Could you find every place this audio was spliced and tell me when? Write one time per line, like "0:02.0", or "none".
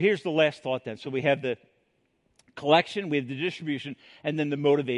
none

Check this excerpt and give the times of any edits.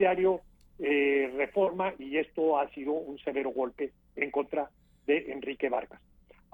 none

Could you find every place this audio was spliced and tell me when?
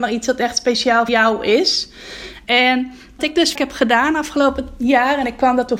0:01.1
0:03.2
0:03.6

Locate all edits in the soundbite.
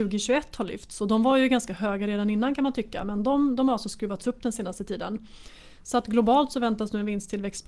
none

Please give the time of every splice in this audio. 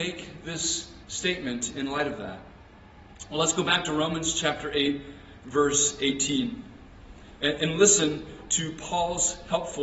0:01.0

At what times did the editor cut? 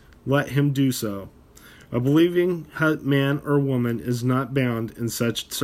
none

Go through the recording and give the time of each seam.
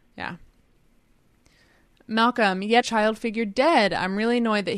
0:02.8

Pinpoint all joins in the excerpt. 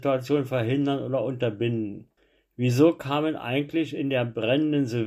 0:02.2

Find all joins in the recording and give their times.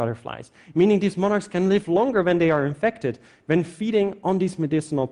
none

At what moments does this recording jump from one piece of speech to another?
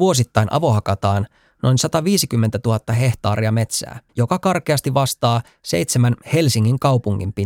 0:04.1

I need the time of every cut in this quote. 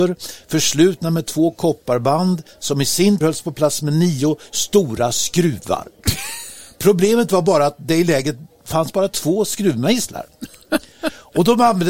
0:03.2

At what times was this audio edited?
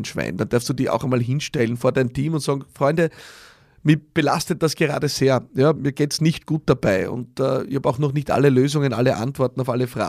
0:05.8

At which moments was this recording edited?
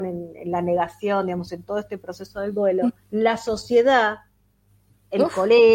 0:03.0

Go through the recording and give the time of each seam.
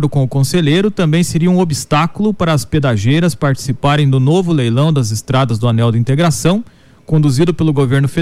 none

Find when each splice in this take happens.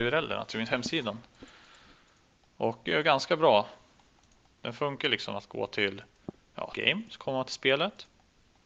0:02.9
0:06.7

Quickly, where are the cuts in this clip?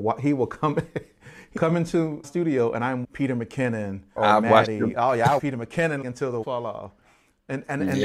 0:01.6
0:02.2
0:03.0
0:04.2
0:04.9
0:05.4
0:06.0
0:06.4

